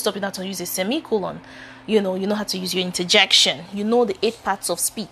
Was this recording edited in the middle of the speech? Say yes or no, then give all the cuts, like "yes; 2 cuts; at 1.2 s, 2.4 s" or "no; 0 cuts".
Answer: no; 0 cuts